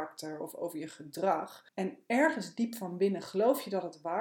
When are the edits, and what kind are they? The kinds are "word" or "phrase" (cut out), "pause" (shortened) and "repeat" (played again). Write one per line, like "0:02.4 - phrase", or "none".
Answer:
0:01.7 - pause